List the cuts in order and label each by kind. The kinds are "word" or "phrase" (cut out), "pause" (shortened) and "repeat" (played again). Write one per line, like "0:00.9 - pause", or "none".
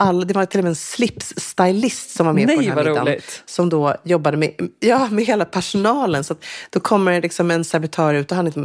none